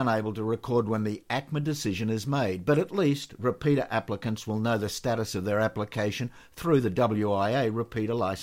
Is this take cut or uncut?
uncut